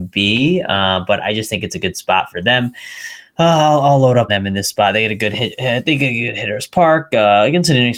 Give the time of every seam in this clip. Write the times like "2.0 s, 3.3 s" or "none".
1.2 s, 4.3 s